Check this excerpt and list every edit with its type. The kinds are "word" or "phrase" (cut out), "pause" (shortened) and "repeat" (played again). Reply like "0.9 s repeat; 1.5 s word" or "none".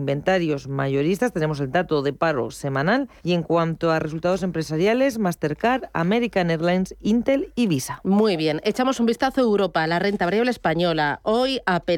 3.2 s pause